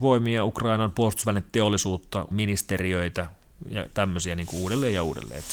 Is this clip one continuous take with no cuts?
no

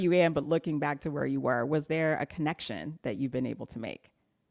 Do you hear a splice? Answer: no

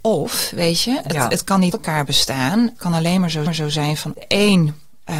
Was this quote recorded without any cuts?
no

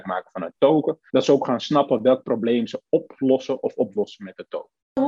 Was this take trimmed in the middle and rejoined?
yes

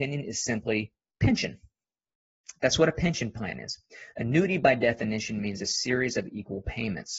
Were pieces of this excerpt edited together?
no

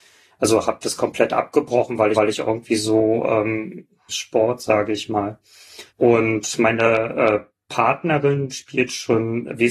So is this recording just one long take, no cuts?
no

